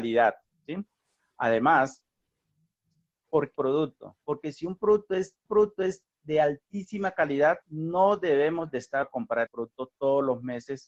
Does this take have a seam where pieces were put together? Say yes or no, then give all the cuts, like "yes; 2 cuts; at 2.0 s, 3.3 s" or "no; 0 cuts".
yes; 6 cuts; at 3.5 s, 4.2 s, 5.5 s, 7.6 s, 9.0 s, 9.5 s